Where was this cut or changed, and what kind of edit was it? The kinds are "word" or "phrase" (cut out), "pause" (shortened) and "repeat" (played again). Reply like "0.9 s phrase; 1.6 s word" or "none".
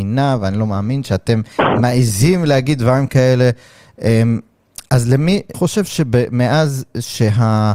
1.5 s pause; 5.5 s word